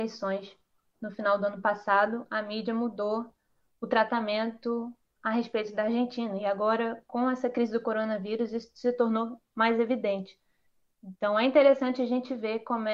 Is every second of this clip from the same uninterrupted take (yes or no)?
yes